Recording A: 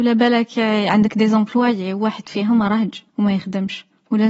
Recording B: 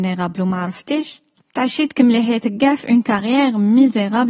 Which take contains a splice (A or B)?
A